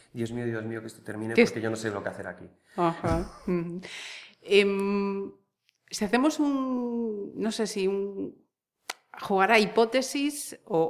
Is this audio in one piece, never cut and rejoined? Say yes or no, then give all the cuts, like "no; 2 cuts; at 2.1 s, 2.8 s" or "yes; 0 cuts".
yes; 0 cuts